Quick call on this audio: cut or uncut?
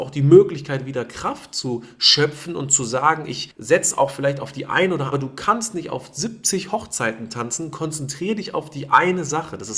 cut